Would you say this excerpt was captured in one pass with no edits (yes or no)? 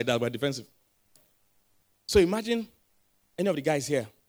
yes